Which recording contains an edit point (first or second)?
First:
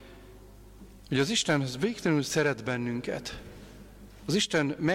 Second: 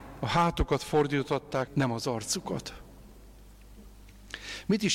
second